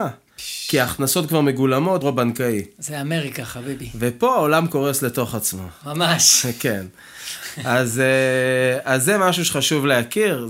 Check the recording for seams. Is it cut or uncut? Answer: cut